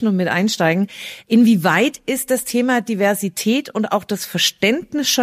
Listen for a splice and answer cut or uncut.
uncut